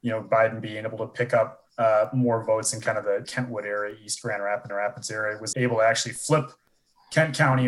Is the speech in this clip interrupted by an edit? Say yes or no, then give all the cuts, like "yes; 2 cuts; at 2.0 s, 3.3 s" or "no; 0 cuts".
yes; 4 cuts; at 1.7 s, 3.2 s, 4.7 s, 5.5 s